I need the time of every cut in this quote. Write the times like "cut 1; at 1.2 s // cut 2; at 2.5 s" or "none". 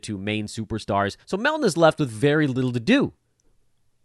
cut 1; at 1.2 s